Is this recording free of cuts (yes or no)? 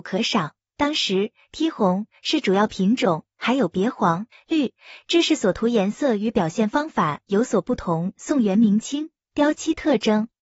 no